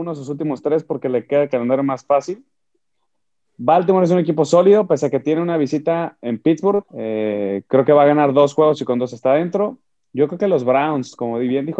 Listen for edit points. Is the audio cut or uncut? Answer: cut